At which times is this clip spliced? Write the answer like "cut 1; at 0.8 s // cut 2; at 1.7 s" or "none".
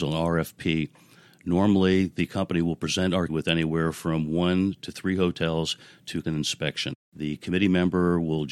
cut 1; at 3.3 s // cut 2; at 6.2 s